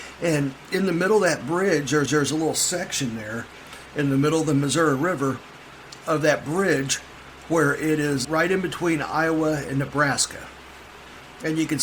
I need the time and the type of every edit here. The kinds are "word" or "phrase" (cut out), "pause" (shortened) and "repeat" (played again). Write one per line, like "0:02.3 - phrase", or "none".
0:02.1 - repeat
0:08.2 - word